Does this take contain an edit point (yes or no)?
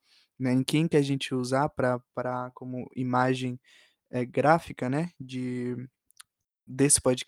no